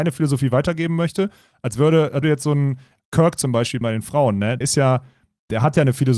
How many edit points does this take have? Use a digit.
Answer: 4